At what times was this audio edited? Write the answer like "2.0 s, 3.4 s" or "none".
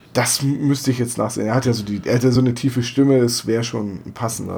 none